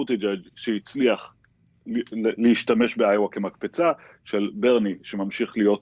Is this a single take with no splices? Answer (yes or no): yes